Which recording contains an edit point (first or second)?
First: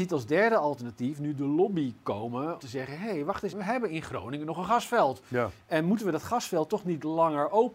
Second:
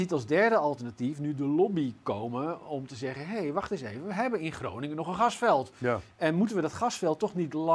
first